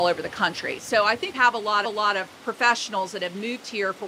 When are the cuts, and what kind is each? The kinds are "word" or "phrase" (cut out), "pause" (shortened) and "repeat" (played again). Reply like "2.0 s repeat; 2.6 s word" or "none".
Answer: 1.3 s word; 1.8 s repeat